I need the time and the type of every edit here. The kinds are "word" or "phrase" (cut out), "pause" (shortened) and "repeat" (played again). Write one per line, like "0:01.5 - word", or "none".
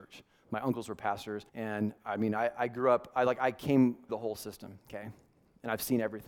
0:01.5 - pause
0:04.1 - phrase